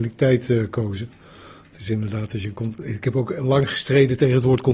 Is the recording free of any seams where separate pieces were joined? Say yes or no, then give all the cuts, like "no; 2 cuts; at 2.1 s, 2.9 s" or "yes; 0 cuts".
yes; 0 cuts